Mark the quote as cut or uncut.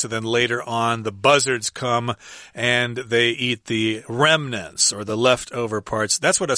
uncut